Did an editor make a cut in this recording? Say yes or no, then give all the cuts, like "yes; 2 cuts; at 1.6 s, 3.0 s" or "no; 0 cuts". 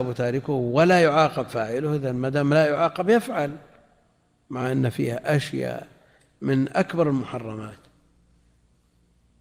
no; 0 cuts